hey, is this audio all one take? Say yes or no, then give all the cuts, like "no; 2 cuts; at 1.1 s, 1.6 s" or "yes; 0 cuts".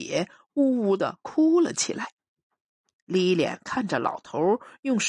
yes; 0 cuts